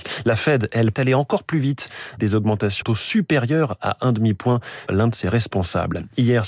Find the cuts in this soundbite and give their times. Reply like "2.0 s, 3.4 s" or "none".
0.9 s, 2.2 s, 2.8 s, 4.9 s